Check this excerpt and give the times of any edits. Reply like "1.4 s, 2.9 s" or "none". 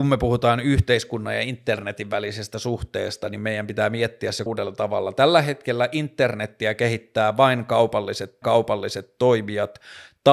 4.5 s, 8.4 s